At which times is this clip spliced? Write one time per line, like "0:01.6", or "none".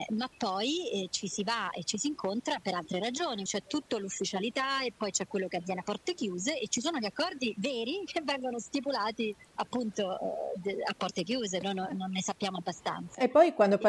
0:03.5
0:09.5
0:11.6